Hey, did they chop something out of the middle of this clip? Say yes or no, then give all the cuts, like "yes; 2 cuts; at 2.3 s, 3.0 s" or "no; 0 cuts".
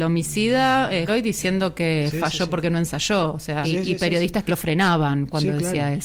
yes; 3 cuts; at 1.1 s, 3.6 s, 4.5 s